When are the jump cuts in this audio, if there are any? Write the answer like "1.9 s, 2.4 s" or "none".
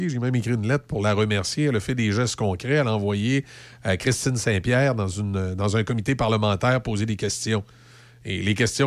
none